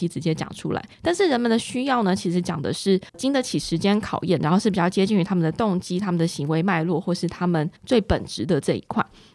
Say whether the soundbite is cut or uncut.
cut